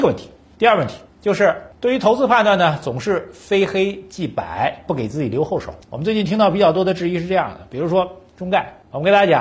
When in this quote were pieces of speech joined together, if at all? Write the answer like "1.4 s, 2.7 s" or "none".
1.1 s